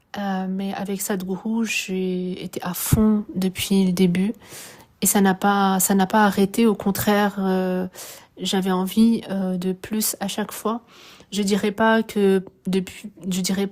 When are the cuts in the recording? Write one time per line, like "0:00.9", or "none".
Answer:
none